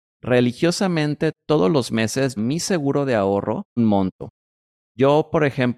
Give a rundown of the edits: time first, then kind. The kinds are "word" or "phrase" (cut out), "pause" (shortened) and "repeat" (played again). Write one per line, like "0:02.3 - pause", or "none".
0:02.4 - phrase
0:03.8 - word